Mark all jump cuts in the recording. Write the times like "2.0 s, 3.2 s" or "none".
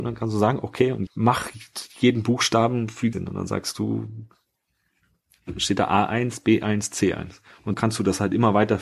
1.1 s, 3.1 s, 7.7 s